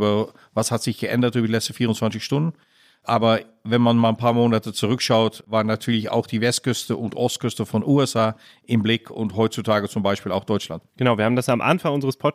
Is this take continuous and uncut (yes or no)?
yes